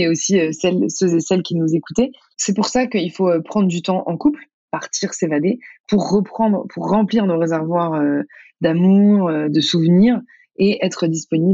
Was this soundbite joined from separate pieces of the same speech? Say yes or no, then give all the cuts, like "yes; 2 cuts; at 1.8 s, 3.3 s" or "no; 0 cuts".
no; 0 cuts